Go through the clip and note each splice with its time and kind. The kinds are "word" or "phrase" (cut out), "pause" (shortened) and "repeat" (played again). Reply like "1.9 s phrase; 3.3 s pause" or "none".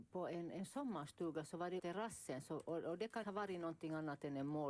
1.8 s word; 3.2 s word